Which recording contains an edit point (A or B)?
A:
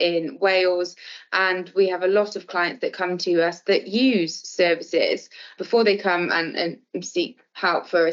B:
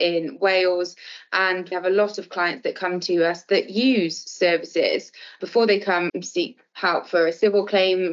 B